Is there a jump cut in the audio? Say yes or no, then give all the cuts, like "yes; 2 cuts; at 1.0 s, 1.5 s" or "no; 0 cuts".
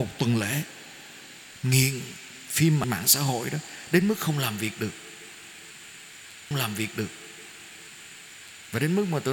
yes; 2 cuts; at 2.8 s, 6.5 s